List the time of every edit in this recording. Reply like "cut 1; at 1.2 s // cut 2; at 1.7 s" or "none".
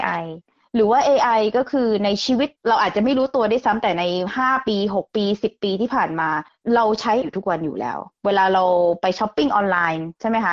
cut 1; at 2.6 s // cut 2; at 7.2 s